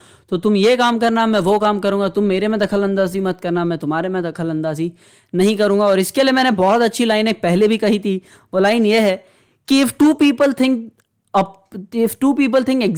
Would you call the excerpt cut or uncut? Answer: uncut